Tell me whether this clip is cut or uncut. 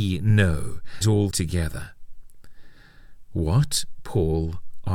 cut